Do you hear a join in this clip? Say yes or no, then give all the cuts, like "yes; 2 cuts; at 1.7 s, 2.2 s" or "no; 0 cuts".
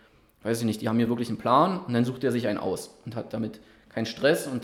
no; 0 cuts